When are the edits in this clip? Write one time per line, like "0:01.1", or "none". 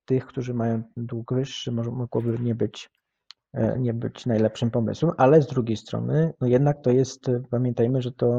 none